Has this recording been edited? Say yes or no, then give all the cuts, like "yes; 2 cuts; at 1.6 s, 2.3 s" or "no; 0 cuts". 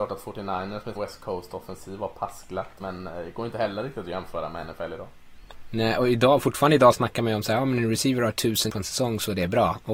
yes; 3 cuts; at 0.9 s, 2.8 s, 8.7 s